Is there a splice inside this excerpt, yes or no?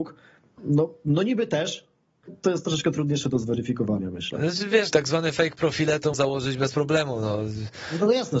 yes